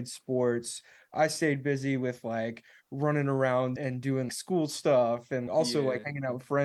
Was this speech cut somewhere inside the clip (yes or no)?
yes